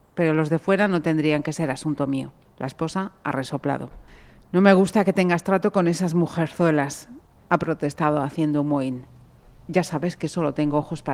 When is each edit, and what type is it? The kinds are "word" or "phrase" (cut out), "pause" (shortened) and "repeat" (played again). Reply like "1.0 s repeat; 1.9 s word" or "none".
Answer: none

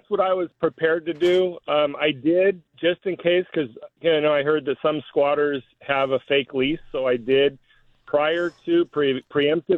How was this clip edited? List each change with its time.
none

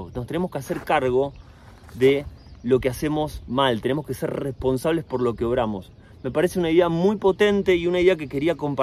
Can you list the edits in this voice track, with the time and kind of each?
none

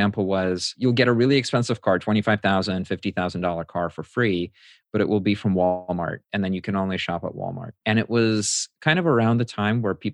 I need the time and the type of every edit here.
none

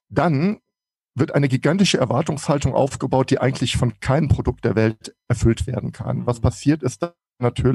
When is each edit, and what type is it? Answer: none

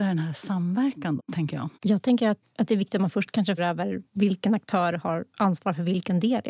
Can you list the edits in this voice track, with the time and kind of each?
1.2 s word; 1.7 s pause; 2.4 s word; 3.6 s word; 4.1 s pause

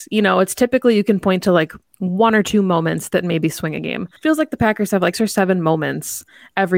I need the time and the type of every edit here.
1.9 s pause; 4.2 s pause; 5.1 s word

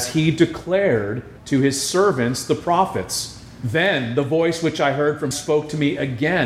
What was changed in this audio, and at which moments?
1.4 s pause; 5.3 s word

